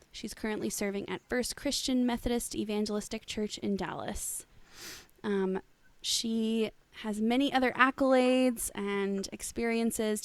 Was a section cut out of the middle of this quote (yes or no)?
no